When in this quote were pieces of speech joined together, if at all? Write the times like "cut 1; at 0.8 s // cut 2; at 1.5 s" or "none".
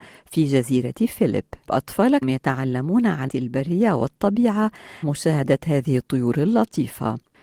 cut 1; at 1.7 s // cut 2; at 2.2 s // cut 3; at 3.3 s // cut 4; at 5.0 s

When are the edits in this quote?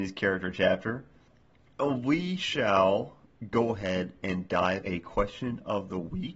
cut 1; at 4.8 s

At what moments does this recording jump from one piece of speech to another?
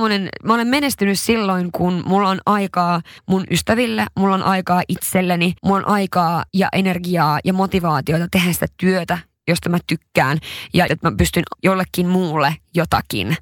cut 1; at 3.2 s // cut 2; at 5.6 s // cut 3; at 6.5 s // cut 4; at 10.9 s // cut 5; at 11.5 s

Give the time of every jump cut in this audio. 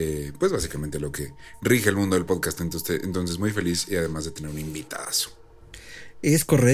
none

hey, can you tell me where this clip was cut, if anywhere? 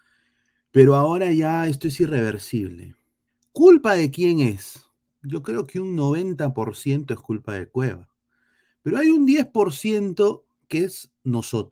cut 1; at 3.3 s

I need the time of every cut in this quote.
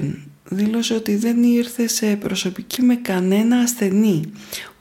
cut 1; at 2.8 s

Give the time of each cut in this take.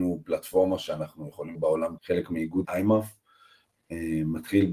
cut 1; at 1.5 s // cut 2; at 2.0 s // cut 3; at 2.6 s

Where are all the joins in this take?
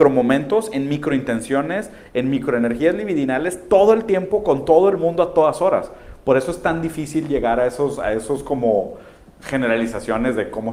none

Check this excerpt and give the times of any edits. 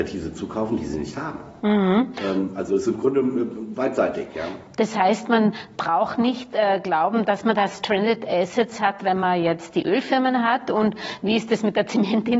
none

